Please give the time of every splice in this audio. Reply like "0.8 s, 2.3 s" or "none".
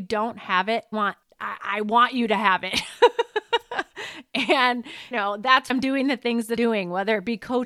0.9 s, 1.2 s, 5.1 s, 5.7 s, 6.6 s